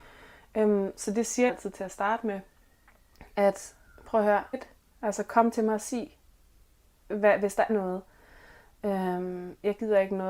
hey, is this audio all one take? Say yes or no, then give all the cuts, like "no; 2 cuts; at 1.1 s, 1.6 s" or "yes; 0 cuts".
no; 3 cuts; at 1.5 s, 4.5 s, 7.7 s